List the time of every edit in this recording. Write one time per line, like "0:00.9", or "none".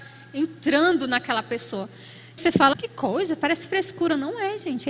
0:02.4
0:02.7